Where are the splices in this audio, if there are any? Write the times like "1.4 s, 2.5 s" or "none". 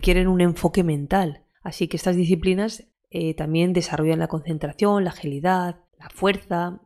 1.5 s, 2.9 s, 5.9 s